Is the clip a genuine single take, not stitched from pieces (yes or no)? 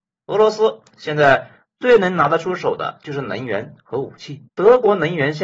no